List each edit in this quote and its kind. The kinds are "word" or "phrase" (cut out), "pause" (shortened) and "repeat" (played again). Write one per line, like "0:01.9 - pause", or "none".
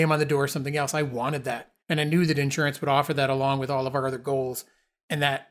0:01.8 - pause